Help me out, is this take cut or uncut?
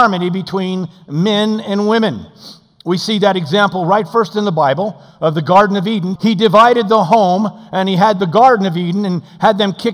cut